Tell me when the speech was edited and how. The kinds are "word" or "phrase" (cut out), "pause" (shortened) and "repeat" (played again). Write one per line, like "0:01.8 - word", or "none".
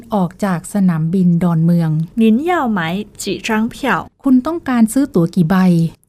0:02.1 - pause
0:04.1 - pause